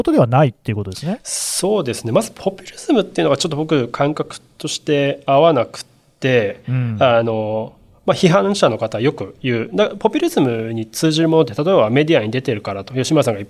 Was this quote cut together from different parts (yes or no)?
no